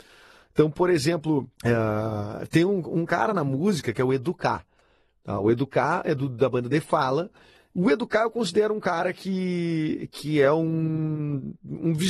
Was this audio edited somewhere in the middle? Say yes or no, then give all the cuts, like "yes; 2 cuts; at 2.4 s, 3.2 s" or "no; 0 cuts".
yes; 1 cut; at 1.6 s